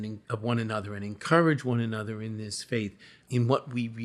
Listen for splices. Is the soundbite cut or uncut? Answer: uncut